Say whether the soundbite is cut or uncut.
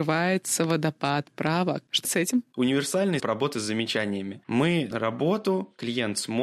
cut